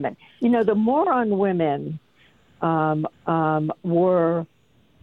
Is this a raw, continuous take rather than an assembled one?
no; 1 cut; at 3.1 s

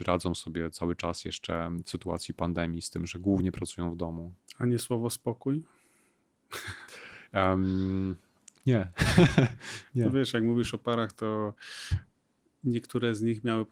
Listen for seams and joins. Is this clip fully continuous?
yes; 0 cuts

